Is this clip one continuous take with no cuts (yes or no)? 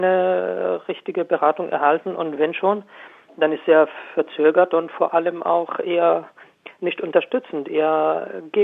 yes